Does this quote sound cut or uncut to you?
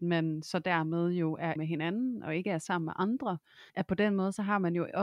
cut